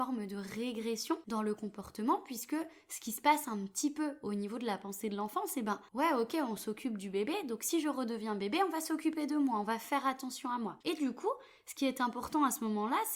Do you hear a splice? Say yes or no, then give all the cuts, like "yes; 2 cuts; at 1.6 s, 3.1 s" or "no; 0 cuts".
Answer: yes; 2 cuts; at 5.9 s, 10.8 s